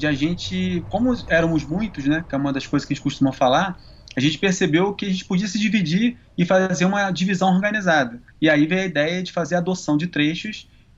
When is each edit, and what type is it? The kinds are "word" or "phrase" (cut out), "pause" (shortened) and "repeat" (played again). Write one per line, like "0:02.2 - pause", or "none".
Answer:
0:08.3 - pause